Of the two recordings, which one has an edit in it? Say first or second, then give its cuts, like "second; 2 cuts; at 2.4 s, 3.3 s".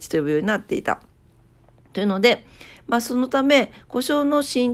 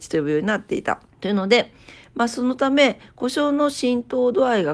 second; 1 cut; at 1.1 s